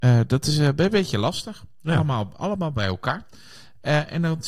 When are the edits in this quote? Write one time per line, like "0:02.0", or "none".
none